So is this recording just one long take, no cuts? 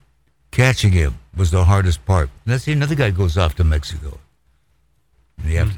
yes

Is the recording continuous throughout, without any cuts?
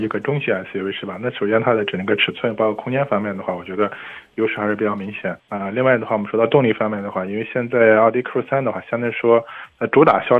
no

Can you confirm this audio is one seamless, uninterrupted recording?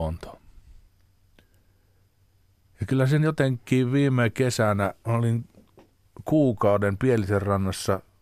yes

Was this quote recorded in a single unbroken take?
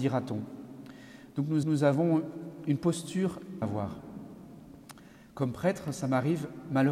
no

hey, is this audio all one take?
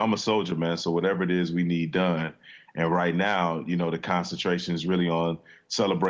yes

